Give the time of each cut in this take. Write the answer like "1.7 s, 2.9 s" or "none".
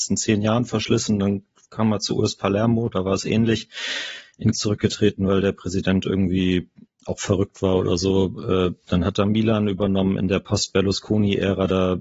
4.5 s, 6.9 s